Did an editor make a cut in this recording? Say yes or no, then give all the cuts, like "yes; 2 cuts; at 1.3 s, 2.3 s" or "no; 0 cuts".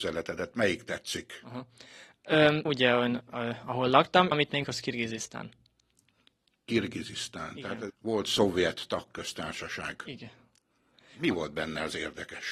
yes; 4 cuts; at 2.7 s, 4.3 s, 4.6 s, 7.9 s